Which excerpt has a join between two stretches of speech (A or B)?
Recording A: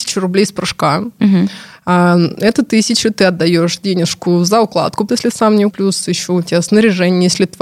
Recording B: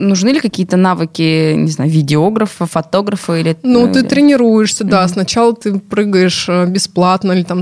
A